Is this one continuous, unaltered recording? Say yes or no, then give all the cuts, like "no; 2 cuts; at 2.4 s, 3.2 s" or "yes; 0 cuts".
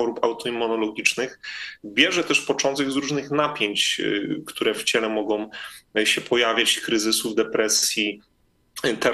yes; 0 cuts